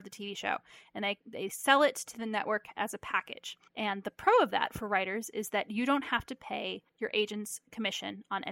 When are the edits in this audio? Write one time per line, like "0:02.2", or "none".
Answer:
0:03.7
0:06.9